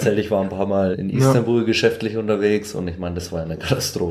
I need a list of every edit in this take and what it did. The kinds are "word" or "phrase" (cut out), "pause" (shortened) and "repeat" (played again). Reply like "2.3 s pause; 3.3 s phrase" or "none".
0.9 s word